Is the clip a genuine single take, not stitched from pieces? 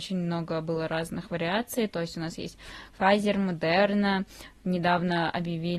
yes; 0 cuts

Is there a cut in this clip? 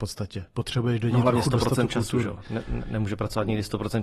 no; 0 cuts

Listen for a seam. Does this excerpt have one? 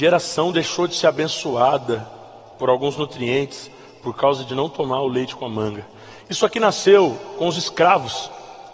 no; 0 cuts

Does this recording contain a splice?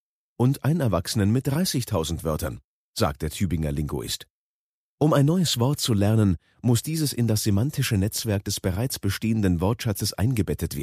no; 0 cuts

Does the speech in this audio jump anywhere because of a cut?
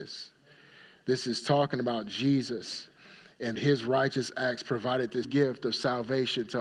yes; 2 cuts; at 3.6 s, 5.2 s

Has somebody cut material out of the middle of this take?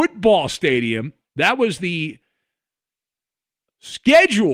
no; 0 cuts

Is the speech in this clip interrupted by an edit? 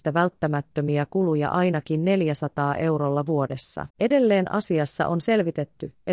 yes; 1 cut; at 3.9 s

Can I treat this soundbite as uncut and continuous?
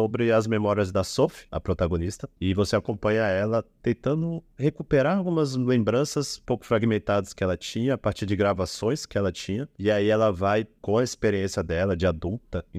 yes; 0 cuts

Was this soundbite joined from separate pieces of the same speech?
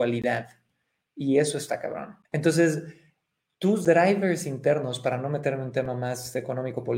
yes; 1 cut; at 2.2 s

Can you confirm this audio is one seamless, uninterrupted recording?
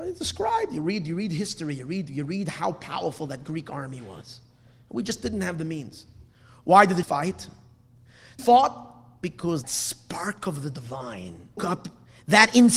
no; 4 cuts; at 7.0 s, 8.4 s, 9.6 s, 11.6 s

